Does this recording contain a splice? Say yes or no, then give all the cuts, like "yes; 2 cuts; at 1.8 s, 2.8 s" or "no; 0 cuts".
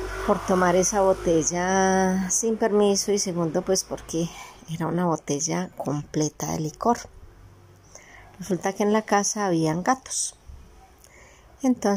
no; 0 cuts